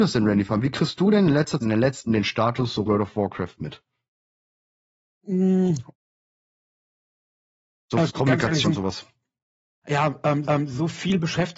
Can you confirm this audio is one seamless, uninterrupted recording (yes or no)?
no